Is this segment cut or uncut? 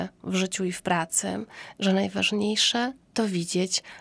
uncut